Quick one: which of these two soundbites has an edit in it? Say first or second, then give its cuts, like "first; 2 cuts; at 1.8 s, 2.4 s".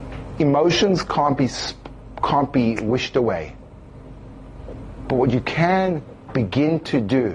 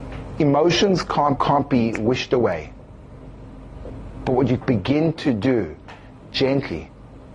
second; 2 cuts; at 1.4 s, 4.6 s